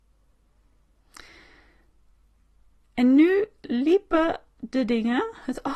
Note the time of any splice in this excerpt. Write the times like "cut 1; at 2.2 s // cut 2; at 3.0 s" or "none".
none